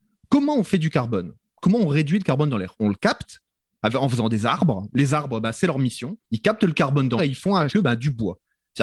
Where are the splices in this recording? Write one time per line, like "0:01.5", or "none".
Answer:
0:06.2
0:07.2
0:07.7